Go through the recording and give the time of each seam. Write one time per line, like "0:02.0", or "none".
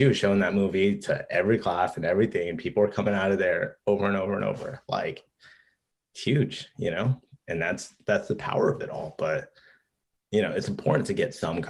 none

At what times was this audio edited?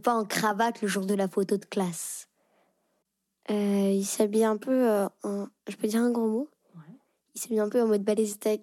none

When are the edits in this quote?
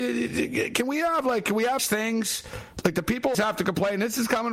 0:01.8
0:03.3

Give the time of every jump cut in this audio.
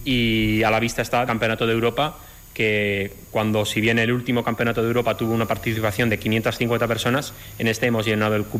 0:01.3

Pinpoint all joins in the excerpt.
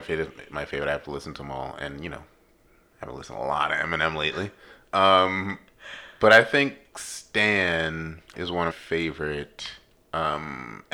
0:08.3
0:08.7

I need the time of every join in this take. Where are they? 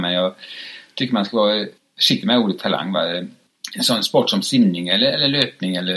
none

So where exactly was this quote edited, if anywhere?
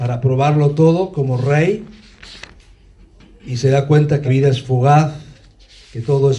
0:04.2

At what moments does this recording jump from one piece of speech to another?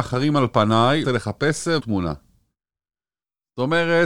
0:01.0
0:01.8

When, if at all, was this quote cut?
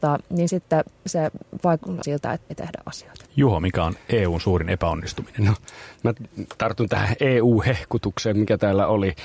0:02.0
0:02.5

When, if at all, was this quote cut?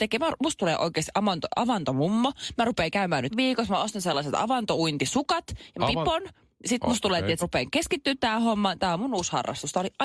0:03.3
0:05.8
0:07.4

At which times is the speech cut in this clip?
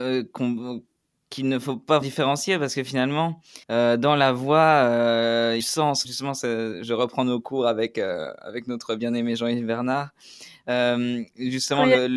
0:02.0
0:03.6
0:05.6
0:06.0

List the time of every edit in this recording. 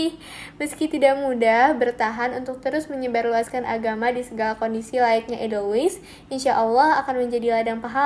none

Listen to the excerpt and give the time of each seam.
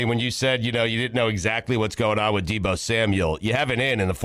none

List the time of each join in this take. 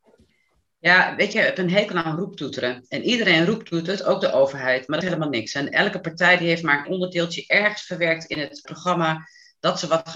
0:01.3
0:05.0
0:06.8
0:08.6

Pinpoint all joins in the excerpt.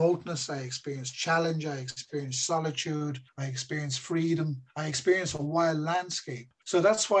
0:04.7

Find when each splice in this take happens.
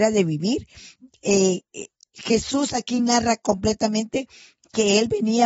none

